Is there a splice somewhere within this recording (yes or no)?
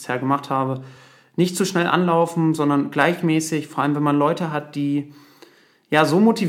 no